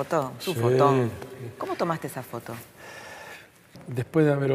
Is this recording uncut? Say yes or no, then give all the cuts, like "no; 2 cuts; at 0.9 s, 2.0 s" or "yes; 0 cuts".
yes; 0 cuts